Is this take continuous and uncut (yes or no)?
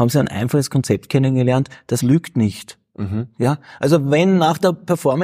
no